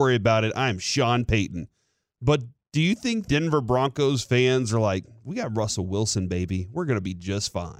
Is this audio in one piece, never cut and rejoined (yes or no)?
no